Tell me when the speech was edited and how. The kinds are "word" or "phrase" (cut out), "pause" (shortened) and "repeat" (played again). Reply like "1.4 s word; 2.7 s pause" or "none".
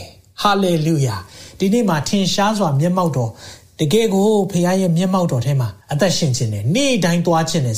5.8 s pause